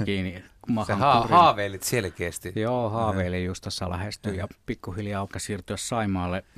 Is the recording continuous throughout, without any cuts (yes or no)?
no